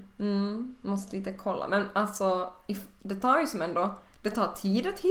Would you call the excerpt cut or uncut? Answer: uncut